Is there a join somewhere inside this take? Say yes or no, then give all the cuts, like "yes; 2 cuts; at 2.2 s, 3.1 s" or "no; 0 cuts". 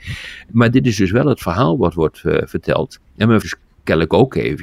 yes; 1 cut; at 3.4 s